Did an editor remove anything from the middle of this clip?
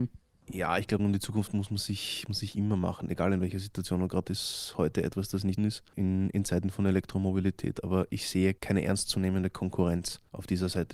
yes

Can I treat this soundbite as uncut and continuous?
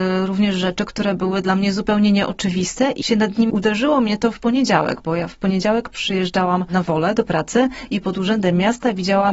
no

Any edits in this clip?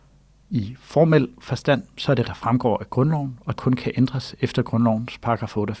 yes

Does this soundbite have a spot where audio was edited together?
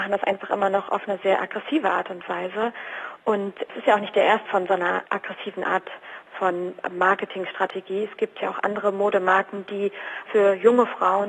yes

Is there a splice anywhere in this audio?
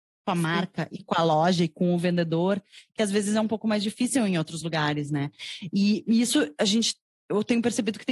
no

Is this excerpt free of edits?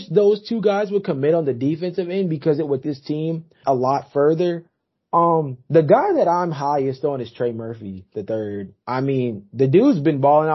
no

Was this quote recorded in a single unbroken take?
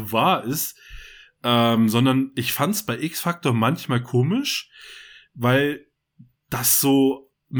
yes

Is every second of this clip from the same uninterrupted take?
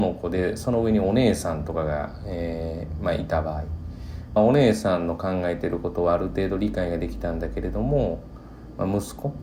no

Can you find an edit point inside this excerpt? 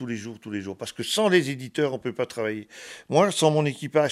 no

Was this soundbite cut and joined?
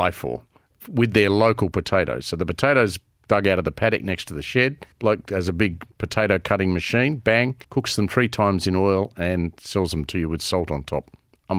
yes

